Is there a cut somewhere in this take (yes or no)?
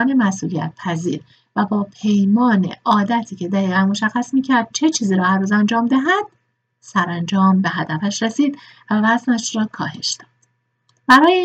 no